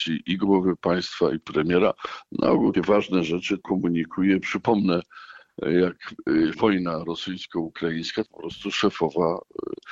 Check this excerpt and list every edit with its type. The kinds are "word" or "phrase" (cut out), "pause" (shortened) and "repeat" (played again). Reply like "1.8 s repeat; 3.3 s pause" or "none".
1.4 s word; 2.7 s word; 3.6 s word; 6.5 s word; 8.2 s word